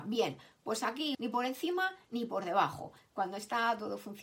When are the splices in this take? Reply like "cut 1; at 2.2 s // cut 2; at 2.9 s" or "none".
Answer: cut 1; at 1.1 s